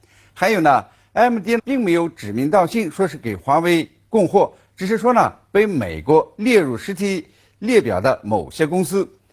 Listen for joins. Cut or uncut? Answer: cut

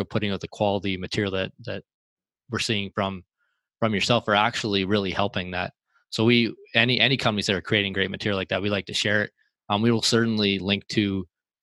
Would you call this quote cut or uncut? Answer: uncut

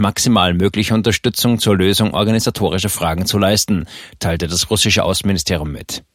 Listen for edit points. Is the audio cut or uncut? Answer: uncut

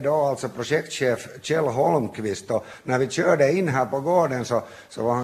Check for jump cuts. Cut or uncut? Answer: uncut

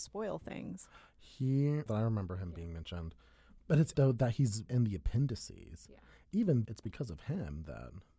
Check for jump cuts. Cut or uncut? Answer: cut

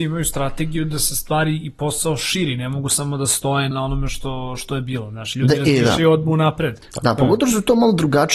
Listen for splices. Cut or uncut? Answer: cut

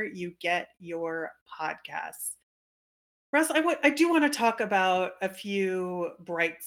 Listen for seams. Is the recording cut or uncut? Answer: uncut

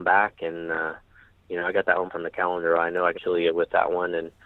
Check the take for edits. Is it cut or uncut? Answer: cut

